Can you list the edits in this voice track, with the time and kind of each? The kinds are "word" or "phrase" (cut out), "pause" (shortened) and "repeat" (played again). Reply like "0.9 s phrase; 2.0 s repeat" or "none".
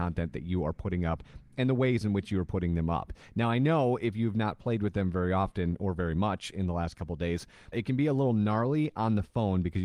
7.7 s word